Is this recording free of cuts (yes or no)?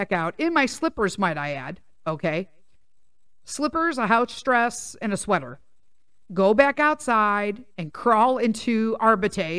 yes